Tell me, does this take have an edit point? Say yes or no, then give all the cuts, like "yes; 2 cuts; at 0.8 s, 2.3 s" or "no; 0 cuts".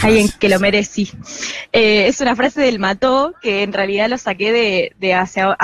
no; 0 cuts